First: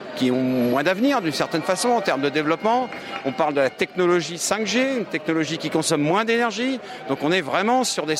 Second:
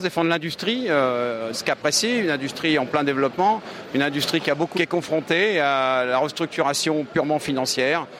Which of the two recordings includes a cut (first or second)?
second